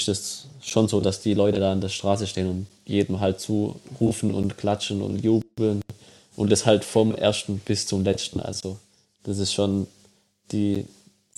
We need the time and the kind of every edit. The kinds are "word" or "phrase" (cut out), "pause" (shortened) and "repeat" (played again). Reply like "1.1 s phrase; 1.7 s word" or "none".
none